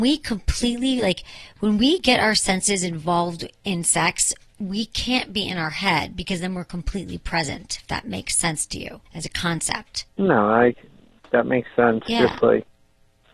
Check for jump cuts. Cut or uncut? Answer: cut